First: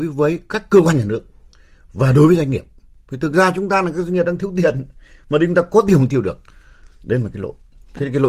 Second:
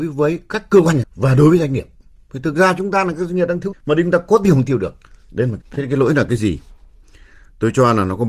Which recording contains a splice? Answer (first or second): second